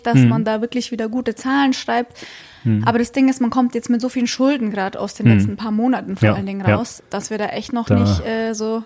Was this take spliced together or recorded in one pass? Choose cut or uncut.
cut